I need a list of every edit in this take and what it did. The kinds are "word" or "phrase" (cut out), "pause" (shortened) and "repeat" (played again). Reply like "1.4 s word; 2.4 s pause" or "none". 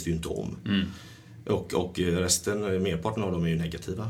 none